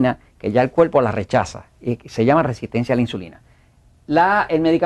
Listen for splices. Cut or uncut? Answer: uncut